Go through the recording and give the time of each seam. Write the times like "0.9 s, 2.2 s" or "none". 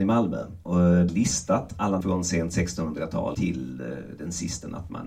1.1 s, 2.0 s, 3.3 s